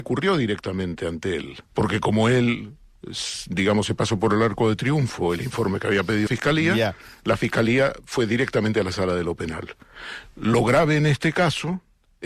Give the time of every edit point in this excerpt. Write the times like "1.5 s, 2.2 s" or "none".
1.7 s, 6.3 s